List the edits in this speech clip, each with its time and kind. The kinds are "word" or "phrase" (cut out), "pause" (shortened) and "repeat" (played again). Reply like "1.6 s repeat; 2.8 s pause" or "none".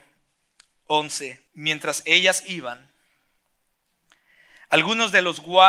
1.5 s pause